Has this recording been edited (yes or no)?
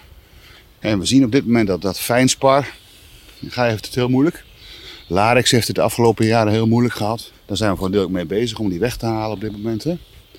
no